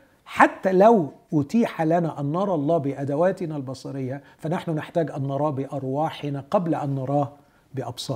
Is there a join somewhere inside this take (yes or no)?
no